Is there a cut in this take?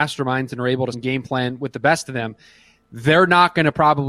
yes; 1 cut; at 0.9 s

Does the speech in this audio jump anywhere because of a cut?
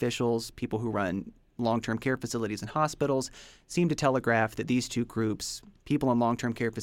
no; 0 cuts

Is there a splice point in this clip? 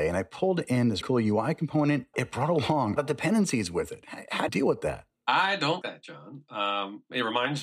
yes; 5 cuts; at 1.0 s, 2.1 s, 3.0 s, 4.5 s, 5.8 s

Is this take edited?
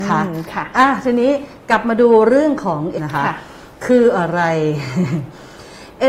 yes; 1 cut; at 3.0 s

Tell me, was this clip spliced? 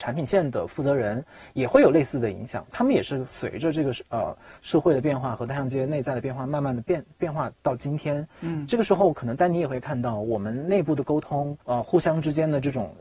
yes; 1 cut; at 11.6 s

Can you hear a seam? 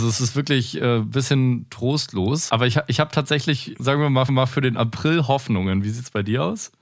yes; 2 cuts; at 3.8 s, 4.3 s

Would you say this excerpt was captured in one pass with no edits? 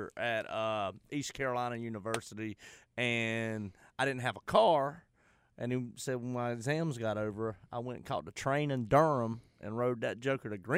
yes; 0 cuts

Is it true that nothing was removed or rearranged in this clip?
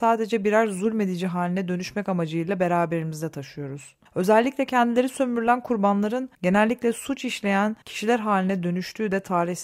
no; 3 cuts; at 4.1 s, 6.3 s, 7.8 s

